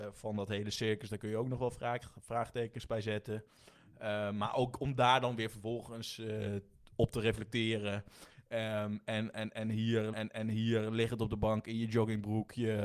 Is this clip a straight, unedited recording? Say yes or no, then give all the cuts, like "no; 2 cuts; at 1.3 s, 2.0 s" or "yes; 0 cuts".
no; 1 cut; at 10.1 s